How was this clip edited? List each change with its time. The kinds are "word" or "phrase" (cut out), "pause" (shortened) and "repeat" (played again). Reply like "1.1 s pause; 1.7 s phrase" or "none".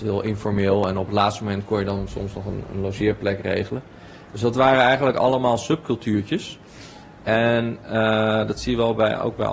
none